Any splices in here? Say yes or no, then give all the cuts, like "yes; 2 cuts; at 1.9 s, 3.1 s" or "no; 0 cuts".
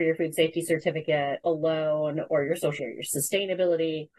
yes; 1 cut; at 2.8 s